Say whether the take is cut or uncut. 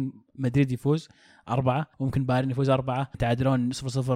cut